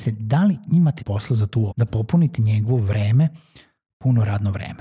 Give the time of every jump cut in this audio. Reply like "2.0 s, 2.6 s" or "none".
1.0 s, 1.7 s